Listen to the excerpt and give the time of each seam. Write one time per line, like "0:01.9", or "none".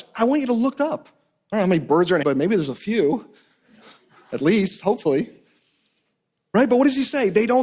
0:02.2